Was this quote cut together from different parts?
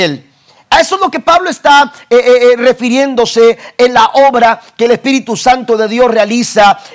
no; 0 cuts

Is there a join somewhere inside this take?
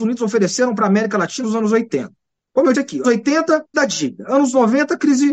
yes; 4 cuts; at 1.4 s, 2.7 s, 3.0 s, 3.7 s

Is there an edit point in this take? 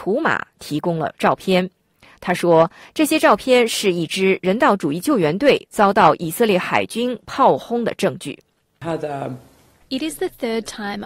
no; 0 cuts

